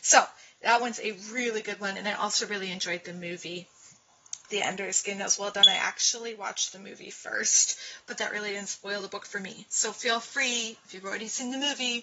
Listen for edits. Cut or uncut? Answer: uncut